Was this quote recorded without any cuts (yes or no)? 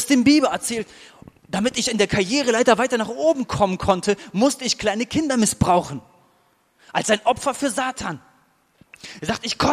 yes